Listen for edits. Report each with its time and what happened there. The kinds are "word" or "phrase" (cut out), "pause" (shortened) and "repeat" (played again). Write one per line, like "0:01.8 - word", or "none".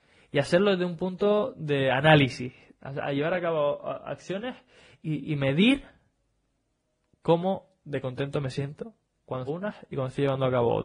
0:09.5 - phrase

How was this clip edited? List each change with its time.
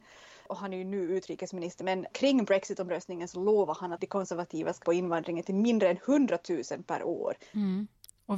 0:01.8 - word
0:02.1 - word
0:04.8 - word

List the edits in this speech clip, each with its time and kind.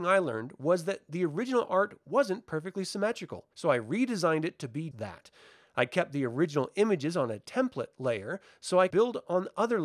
0:03.5 - pause
0:04.9 - word
0:08.9 - word

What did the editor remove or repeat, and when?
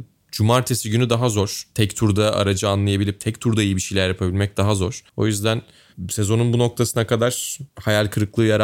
0:05.1 - pause
0:07.7 - pause

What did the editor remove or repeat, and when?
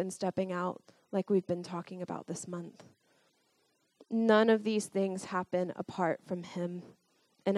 none

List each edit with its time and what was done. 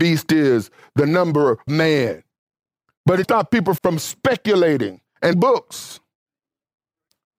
0:01.7 - word
0:03.2 - word
0:03.8 - word
0:05.3 - word

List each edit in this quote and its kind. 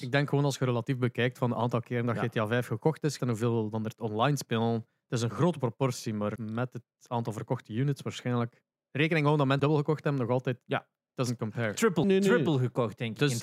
0:03.2 - word
0:06.4 - word
0:09.6 - word
0:12.0 - word

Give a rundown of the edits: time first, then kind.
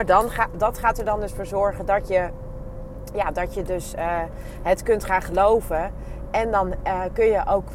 none

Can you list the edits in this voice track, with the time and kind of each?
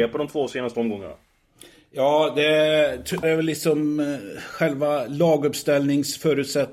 0:03.2 - word

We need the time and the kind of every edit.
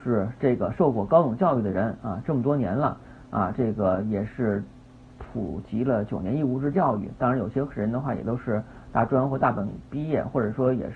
none

